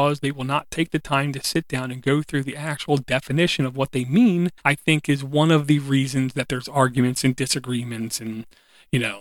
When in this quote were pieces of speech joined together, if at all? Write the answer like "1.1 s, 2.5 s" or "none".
4.6 s